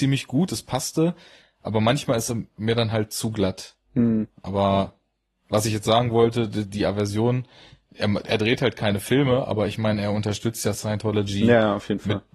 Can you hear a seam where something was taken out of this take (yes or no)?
no